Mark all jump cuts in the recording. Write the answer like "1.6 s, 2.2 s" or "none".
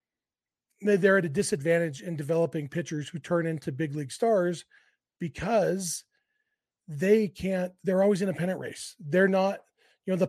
none

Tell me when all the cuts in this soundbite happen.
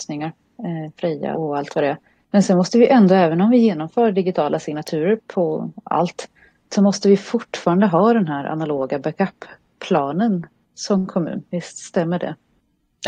1.3 s, 5.2 s, 6.6 s

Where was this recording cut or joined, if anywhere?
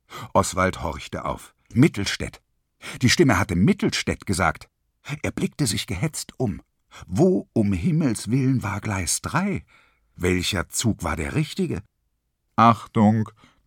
1.6 s

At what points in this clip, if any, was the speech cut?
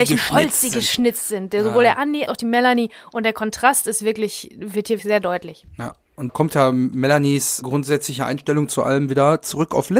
2.3 s, 5.0 s, 6.3 s, 7.6 s

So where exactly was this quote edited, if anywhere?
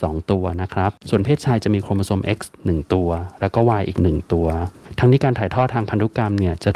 none

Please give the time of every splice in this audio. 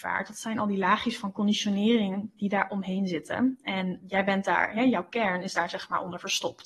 4.0 s

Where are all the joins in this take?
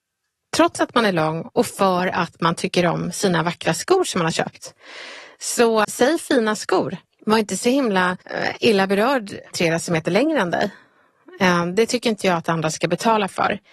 5.8 s, 8.2 s, 9.5 s

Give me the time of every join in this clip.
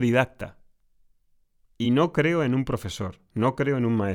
none

